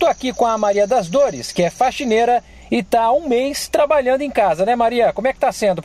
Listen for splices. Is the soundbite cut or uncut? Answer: uncut